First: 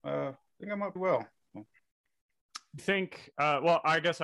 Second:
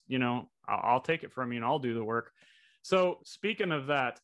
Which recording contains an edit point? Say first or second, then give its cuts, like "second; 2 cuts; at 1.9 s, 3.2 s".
first; 2 cuts; at 1.0 s, 2.8 s